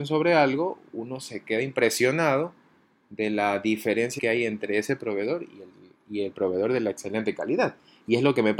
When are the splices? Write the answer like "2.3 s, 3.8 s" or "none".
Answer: 4.2 s